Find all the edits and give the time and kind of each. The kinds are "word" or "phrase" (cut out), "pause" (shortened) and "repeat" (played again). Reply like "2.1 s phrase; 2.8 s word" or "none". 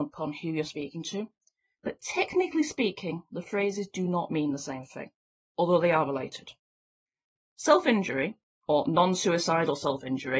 none